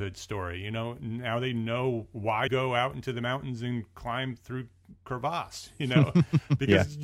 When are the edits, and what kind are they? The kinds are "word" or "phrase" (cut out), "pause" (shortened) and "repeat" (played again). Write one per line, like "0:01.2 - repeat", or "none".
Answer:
0:02.5 - word